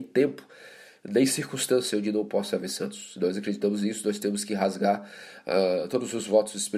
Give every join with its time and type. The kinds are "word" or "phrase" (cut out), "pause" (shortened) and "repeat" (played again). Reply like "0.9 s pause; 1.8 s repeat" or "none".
none